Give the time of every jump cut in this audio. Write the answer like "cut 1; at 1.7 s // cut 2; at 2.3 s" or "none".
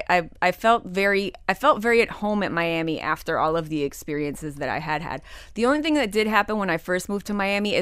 none

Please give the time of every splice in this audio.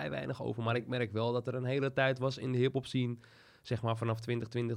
none

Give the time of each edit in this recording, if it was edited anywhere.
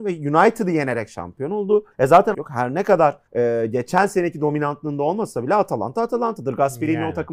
cut 1; at 1.9 s // cut 2; at 2.3 s // cut 3; at 3.3 s

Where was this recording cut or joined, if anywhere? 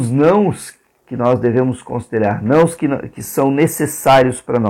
none

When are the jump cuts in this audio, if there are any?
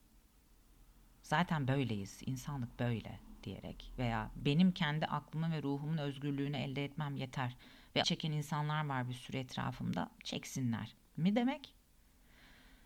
cut 1; at 8.0 s

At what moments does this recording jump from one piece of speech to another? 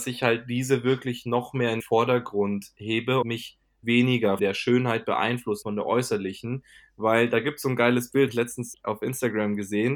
cut 1; at 1.8 s // cut 2; at 3.2 s // cut 3; at 3.8 s // cut 4; at 4.4 s // cut 5; at 5.6 s // cut 6; at 8.3 s // cut 7; at 8.7 s

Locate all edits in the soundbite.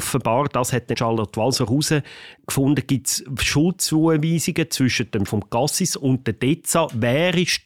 cut 1; at 0.9 s // cut 2; at 5.3 s

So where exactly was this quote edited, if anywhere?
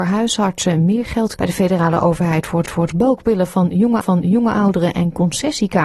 cut 1; at 1.4 s // cut 2; at 2.7 s // cut 3; at 4.0 s

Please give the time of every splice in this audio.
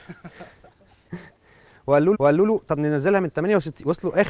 cut 1; at 1.4 s // cut 2; at 2.1 s

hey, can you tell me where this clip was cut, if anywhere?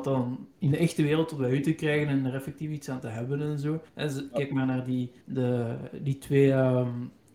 cut 1; at 3.9 s // cut 2; at 5.2 s

